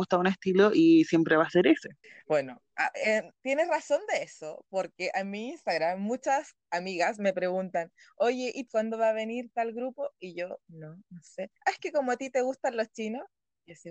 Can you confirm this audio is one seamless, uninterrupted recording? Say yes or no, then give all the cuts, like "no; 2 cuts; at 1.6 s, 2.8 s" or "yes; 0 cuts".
no; 4 cuts; at 2.0 s, 8.7 s, 10.6 s, 11.6 s